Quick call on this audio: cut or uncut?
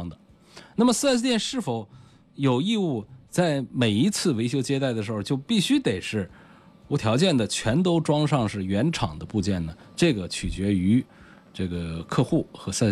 uncut